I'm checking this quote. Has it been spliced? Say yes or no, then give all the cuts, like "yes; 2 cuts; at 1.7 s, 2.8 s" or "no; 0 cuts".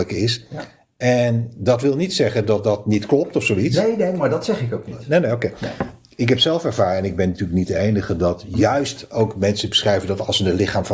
no; 0 cuts